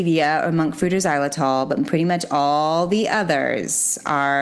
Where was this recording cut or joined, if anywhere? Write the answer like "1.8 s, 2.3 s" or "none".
none